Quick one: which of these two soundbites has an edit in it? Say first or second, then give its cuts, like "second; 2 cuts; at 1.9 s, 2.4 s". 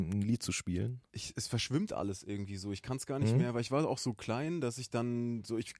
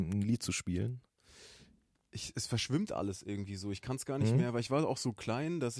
first; 1 cut; at 1.1 s